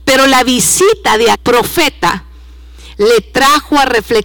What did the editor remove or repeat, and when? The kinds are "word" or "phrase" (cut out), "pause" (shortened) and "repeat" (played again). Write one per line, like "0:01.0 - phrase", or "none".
0:01.3 - word